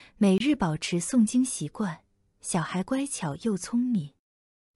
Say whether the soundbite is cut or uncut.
uncut